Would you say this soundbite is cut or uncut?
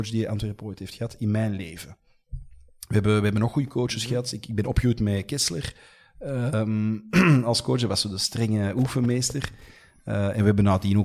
uncut